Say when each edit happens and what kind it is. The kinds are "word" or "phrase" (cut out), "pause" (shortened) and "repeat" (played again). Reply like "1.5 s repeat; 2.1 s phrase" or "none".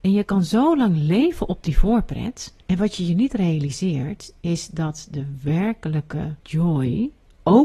2.6 s pause; 6.4 s pause

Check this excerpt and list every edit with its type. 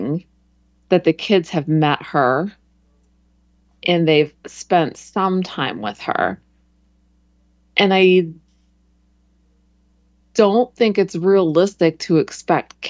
none

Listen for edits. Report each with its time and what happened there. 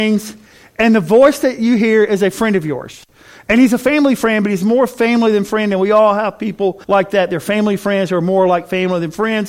6.8 s pause

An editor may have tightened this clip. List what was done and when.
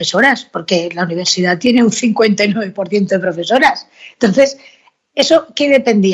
none

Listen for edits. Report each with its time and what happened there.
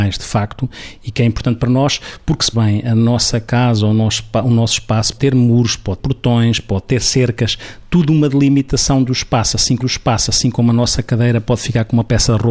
2.5 s word; 5.2 s word; 6.0 s word; 9.8 s repeat

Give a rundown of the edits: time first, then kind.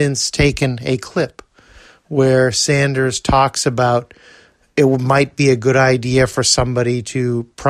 none

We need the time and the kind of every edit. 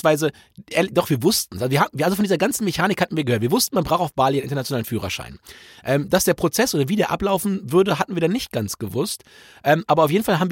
none

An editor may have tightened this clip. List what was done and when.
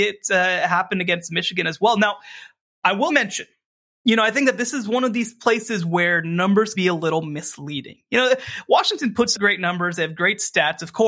3.1 s word; 6.7 s word; 9.3 s word

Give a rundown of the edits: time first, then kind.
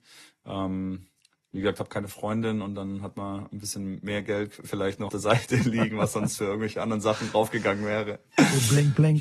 5.1 s word

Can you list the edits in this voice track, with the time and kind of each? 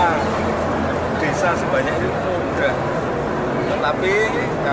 2.1 s word

